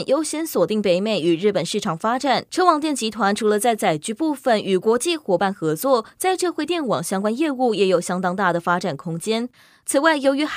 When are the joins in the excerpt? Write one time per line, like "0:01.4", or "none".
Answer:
none